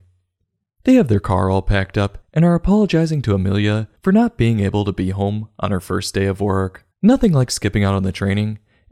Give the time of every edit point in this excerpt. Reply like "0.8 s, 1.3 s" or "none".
2.2 s, 4.0 s, 6.9 s